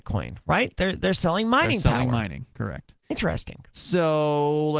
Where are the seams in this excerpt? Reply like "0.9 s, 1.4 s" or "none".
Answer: 3.0 s